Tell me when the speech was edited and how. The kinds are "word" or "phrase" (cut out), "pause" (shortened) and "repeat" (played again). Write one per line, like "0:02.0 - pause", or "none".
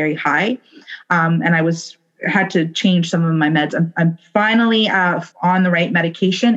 0:05.3 - pause